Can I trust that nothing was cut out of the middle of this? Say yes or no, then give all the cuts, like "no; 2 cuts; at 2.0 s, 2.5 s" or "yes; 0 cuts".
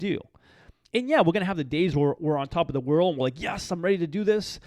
yes; 0 cuts